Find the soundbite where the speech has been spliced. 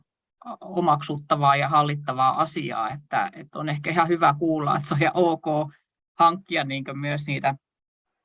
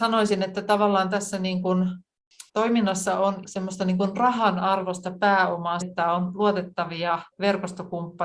second; 4 cuts; at 2.5 s, 3.4 s, 5.8 s, 7.3 s

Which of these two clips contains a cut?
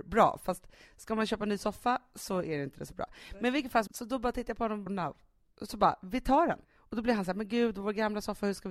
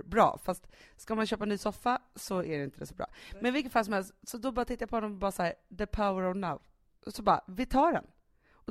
first; 3 cuts; at 3.9 s, 4.9 s, 6.6 s

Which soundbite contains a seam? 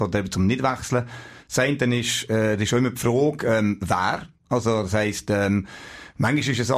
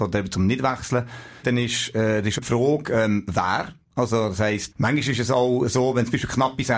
second; 3 cuts; at 1.4 s, 2.4 s, 4.7 s

